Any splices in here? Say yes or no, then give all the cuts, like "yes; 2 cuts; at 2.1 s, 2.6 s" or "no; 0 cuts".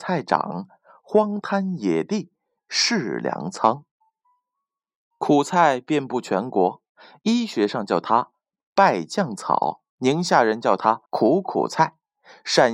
yes; 2 cuts; at 9.9 s, 11.1 s